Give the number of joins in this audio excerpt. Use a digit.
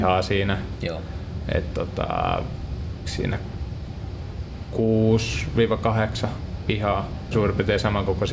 2